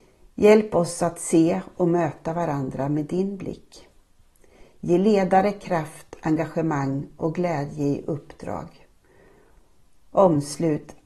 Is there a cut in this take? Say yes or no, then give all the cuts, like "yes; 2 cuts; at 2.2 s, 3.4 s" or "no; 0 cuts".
no; 0 cuts